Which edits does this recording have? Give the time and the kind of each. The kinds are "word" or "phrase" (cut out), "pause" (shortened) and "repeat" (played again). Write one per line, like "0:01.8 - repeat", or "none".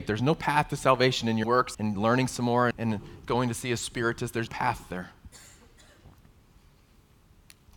0:01.4 - word
0:01.7 - word
0:02.7 - word
0:04.5 - word